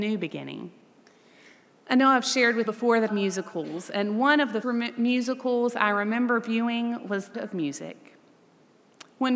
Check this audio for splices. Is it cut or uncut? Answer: cut